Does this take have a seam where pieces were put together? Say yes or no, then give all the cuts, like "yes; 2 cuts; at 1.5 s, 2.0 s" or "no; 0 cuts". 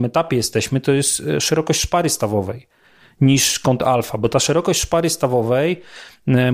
no; 0 cuts